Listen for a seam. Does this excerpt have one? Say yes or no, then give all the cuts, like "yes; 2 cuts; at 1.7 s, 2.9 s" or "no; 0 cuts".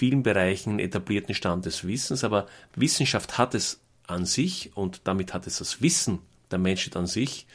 no; 0 cuts